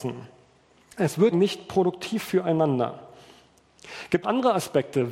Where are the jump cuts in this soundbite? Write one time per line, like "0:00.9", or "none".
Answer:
0:01.3
0:04.2